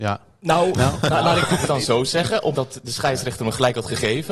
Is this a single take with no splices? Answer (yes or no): no